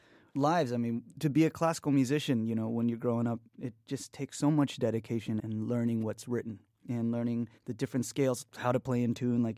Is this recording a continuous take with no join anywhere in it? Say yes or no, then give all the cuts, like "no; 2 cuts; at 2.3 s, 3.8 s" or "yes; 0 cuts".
no; 3 cuts; at 3.5 s, 5.4 s, 7.6 s